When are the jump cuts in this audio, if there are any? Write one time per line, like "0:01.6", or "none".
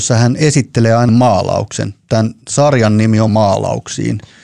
0:01.1
0:02.4
0:03.3